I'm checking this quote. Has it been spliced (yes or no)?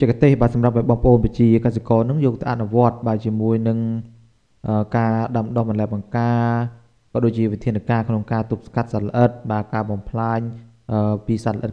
no